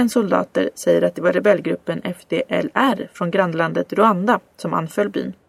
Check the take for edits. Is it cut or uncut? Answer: uncut